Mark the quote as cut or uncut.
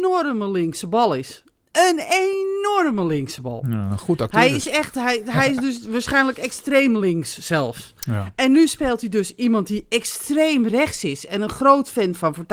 uncut